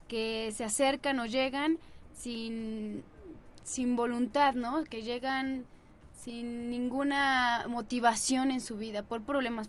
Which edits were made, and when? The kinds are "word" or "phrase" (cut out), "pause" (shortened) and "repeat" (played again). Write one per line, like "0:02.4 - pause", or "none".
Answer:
none